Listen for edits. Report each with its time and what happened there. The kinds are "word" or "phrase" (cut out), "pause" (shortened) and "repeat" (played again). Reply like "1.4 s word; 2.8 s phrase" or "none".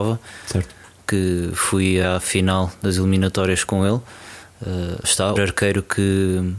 2.0 s word; 5.0 s word; 5.4 s word